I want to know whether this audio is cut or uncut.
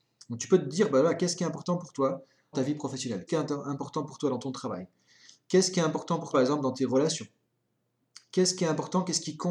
cut